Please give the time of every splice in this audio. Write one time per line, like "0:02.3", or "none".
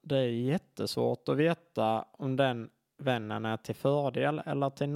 none